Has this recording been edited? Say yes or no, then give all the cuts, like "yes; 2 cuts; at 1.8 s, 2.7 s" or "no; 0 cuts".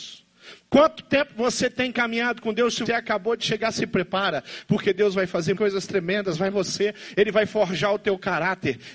yes; 3 cuts; at 2.9 s, 5.6 s, 6.5 s